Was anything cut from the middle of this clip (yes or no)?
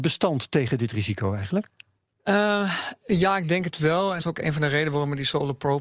yes